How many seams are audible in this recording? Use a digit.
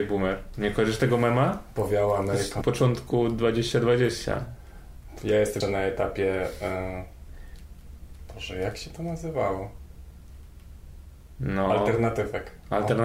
2